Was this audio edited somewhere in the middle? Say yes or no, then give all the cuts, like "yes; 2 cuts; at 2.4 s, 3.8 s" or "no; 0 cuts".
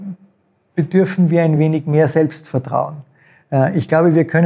no; 0 cuts